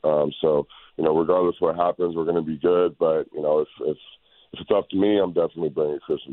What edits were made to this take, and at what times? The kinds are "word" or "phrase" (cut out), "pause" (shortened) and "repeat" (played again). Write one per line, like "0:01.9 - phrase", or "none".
none

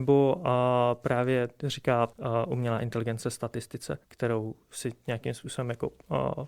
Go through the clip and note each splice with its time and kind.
0:02.1 - pause
0:04.0 - pause

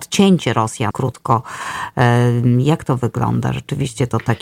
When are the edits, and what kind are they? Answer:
0:00.9 - word

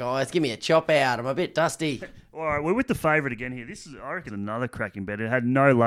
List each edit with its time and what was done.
0:04.3 - word

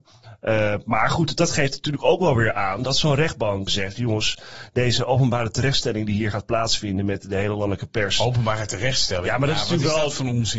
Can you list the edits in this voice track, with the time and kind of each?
0:03.7 - word

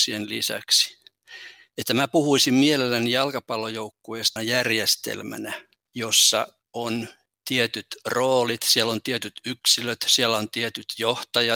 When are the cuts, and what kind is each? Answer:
0:04.4 - word

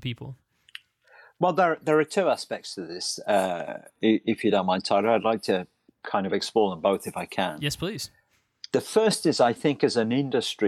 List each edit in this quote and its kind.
0:05.9 - pause

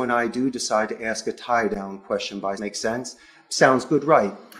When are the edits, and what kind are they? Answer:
0:02.6 - phrase

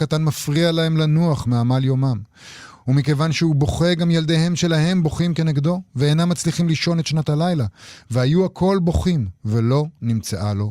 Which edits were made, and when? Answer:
none

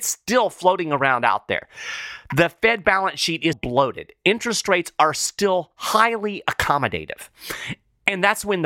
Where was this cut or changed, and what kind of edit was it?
0:03.5 - word

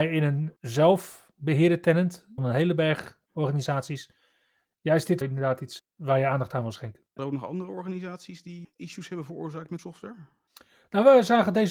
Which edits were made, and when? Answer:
0:02.4 - word
0:05.2 - word
0:05.8 - word
0:07.2 - word
0:08.6 - word
0:09.8 - word

